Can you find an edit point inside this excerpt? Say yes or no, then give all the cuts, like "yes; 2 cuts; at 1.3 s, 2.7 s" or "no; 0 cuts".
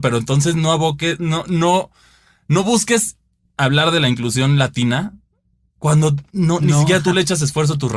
yes; 1 cut; at 6.3 s